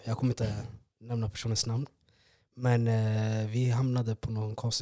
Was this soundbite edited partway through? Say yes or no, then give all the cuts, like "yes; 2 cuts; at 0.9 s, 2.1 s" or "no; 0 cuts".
no; 0 cuts